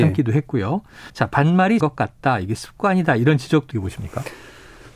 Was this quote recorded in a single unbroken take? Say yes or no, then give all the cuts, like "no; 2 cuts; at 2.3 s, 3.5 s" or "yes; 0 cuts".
no; 3 cuts; at 1.1 s, 1.8 s, 3.7 s